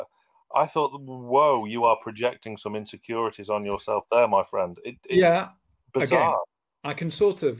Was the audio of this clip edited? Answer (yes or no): no